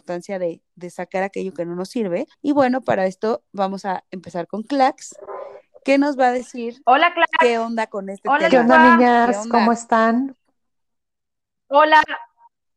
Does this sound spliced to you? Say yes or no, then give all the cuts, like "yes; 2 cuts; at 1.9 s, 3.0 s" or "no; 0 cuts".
yes; 2 cuts; at 2.3 s, 3.5 s